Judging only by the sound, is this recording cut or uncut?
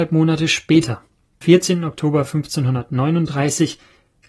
cut